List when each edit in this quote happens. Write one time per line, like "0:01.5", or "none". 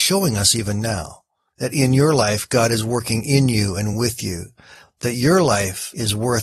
none